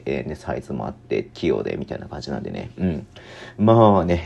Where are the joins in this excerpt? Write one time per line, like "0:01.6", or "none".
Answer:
0:01.3